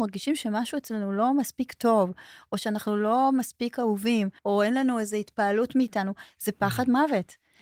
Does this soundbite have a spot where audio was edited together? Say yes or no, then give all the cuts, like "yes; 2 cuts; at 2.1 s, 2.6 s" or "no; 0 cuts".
yes; 1 cut; at 4.4 s